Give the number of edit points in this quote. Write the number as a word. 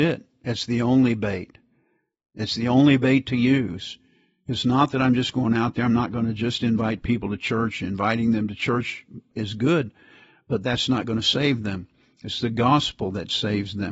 zero